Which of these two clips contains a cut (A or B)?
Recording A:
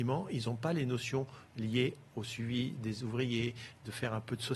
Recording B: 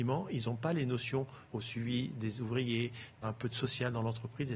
B